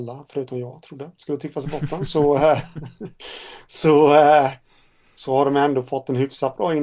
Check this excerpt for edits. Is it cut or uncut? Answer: uncut